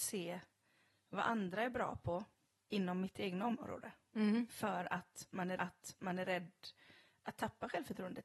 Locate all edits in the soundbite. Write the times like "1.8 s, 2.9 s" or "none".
5.6 s